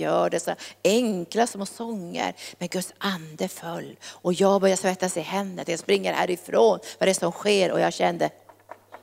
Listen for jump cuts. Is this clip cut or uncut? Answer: uncut